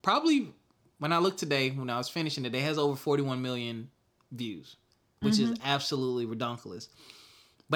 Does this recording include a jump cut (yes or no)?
no